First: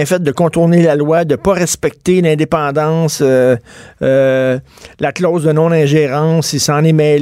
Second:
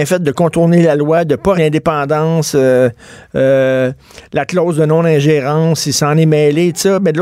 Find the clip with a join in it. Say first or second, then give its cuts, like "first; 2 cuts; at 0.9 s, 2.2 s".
second; 1 cut; at 1.5 s